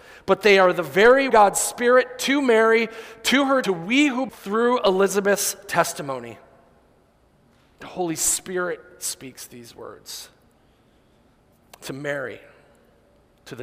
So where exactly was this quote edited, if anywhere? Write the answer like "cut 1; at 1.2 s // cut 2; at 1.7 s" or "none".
cut 1; at 1.3 s // cut 2; at 3.6 s // cut 3; at 4.3 s // cut 4; at 7.1 s